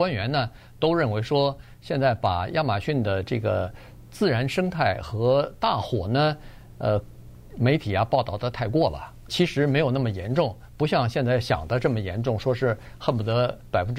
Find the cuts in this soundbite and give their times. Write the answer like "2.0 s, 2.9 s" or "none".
9.3 s